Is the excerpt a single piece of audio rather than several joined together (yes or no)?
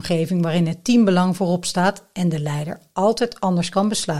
yes